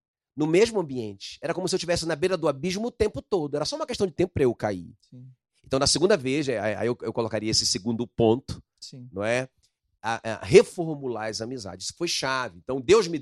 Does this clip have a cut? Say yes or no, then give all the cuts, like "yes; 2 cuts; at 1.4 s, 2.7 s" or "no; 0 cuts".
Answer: no; 0 cuts